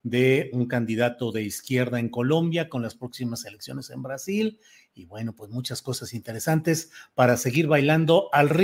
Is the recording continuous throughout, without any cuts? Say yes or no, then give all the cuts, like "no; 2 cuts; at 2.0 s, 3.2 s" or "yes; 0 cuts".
yes; 0 cuts